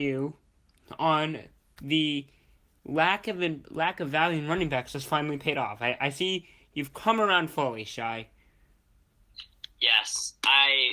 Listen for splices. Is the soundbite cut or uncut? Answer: uncut